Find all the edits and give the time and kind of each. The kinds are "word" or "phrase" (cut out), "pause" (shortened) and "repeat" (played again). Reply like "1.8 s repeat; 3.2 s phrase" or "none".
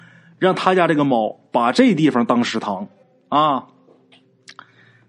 3.0 s pause